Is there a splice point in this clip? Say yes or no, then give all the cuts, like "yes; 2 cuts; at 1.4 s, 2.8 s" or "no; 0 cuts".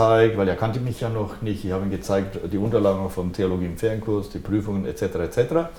no; 0 cuts